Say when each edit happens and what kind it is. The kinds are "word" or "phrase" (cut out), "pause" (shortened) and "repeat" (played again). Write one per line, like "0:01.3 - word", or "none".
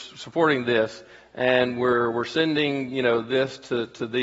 none